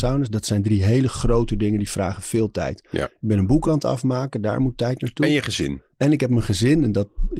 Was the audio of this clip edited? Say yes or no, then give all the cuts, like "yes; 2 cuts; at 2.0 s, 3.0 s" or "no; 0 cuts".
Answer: no; 0 cuts